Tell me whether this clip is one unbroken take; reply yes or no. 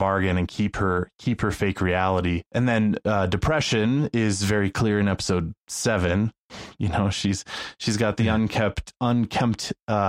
no